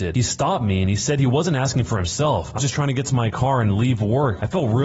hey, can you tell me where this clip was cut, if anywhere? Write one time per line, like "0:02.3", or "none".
0:02.6